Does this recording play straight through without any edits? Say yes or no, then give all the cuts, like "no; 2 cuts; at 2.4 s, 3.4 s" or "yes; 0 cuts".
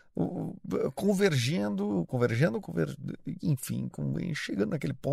no; 1 cut; at 2.6 s